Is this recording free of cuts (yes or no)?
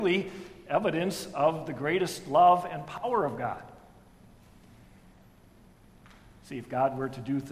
yes